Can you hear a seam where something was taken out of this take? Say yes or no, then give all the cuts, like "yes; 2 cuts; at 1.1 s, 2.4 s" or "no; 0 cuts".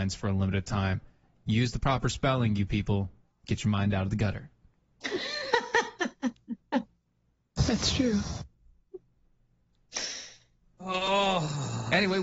no; 0 cuts